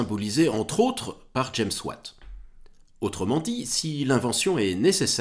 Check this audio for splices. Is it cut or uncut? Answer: uncut